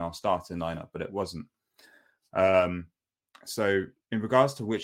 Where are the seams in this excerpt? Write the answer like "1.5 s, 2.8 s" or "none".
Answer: none